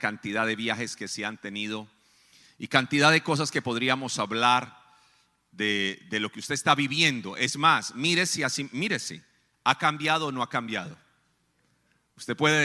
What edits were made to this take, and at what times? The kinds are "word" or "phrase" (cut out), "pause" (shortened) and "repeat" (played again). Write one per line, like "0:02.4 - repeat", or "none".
none